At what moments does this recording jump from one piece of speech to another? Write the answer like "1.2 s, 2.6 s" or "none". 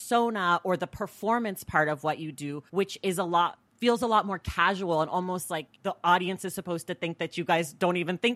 2.7 s, 3.7 s, 5.8 s